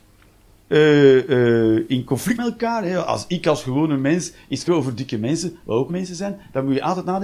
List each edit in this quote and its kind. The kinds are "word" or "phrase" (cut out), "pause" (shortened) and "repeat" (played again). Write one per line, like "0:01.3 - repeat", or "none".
0:02.4 - word
0:04.7 - word
0:05.9 - word